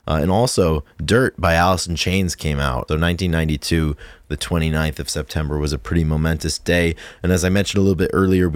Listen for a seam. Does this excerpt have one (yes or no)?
yes